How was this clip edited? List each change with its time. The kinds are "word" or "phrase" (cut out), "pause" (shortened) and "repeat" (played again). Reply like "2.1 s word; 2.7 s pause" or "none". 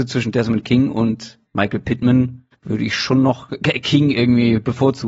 2.5 s pause